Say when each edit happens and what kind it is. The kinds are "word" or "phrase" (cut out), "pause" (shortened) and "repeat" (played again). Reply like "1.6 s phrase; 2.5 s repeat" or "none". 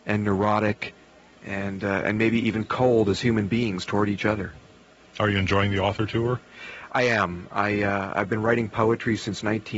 none